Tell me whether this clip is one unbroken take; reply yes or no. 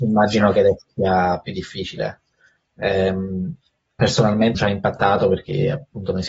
no